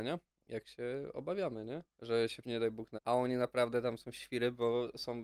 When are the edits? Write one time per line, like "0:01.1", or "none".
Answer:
0:01.9
0:02.4
0:02.9

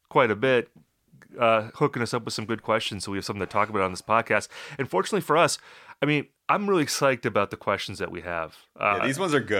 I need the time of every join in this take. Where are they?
0:06.4

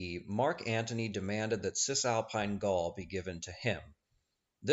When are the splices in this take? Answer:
none

